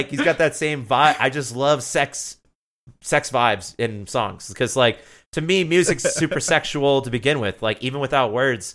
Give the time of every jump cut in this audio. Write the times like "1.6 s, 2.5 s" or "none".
none